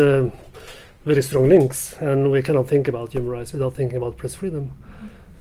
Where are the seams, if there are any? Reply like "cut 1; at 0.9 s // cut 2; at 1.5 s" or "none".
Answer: none